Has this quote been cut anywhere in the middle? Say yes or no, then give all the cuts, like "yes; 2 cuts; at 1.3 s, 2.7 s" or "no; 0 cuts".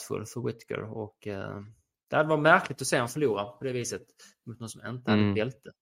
no; 0 cuts